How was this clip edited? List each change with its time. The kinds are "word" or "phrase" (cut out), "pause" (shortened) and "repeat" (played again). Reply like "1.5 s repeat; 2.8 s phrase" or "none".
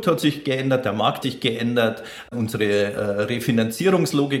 1.2 s word